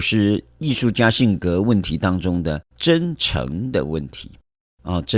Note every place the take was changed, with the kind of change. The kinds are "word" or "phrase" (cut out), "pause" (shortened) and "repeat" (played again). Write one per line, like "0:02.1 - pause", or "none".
0:02.7 - pause